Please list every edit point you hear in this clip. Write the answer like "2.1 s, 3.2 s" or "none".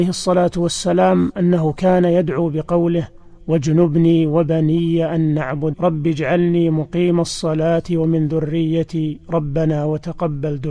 5.7 s